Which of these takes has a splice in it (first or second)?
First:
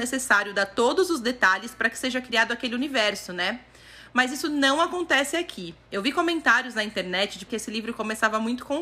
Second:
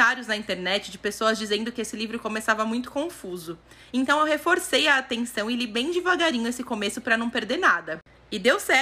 first